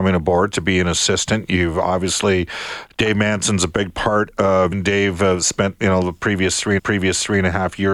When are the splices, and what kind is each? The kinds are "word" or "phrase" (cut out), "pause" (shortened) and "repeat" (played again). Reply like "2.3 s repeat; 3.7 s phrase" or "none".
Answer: 4.7 s word; 6.8 s repeat